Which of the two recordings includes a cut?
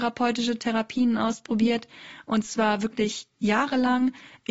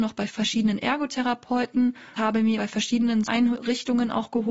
second; 3 cuts; at 2.1 s, 2.6 s, 3.3 s

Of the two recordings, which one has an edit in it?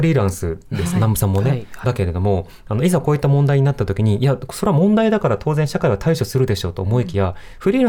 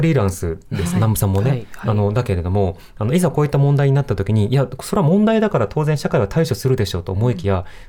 first; 1 cut; at 1.8 s

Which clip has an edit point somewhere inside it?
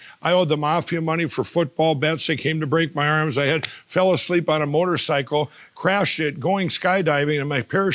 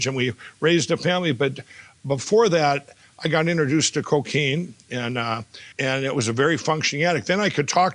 second; 1 cut; at 5.7 s

